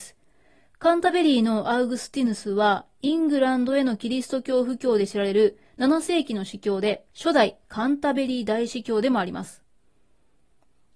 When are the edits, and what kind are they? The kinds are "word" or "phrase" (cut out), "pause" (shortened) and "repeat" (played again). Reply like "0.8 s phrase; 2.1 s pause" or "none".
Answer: 7.1 s pause